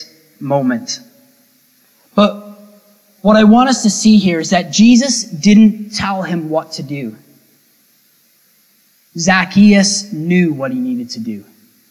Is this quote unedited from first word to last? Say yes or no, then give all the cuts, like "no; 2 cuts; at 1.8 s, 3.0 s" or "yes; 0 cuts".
yes; 0 cuts